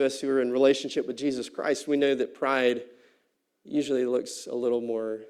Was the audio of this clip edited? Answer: no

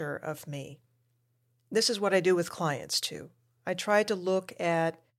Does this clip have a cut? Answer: no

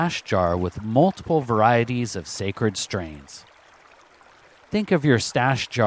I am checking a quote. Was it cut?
no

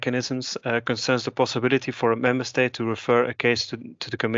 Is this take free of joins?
yes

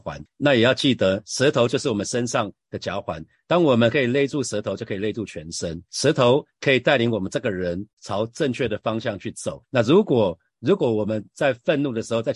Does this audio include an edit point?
yes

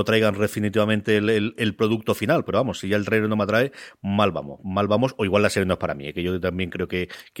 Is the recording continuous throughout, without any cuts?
no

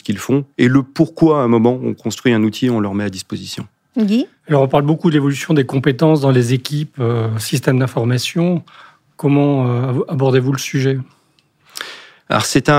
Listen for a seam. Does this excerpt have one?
no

